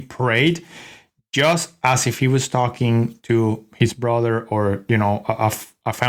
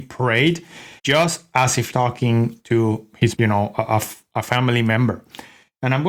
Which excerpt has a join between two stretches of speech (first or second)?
second